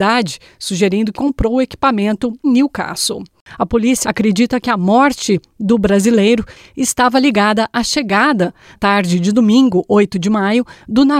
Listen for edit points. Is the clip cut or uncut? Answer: cut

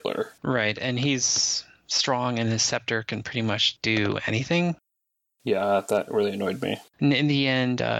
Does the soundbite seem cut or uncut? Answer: uncut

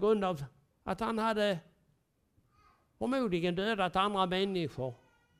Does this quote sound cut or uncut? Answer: uncut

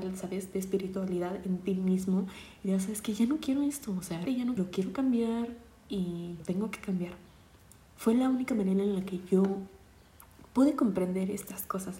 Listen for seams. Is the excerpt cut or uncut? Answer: cut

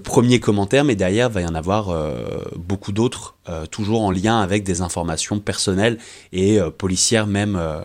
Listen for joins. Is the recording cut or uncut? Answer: uncut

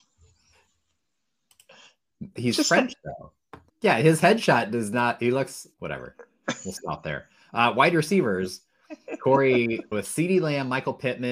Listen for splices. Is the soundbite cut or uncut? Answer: cut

